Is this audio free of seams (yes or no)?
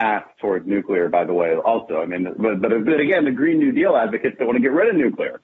yes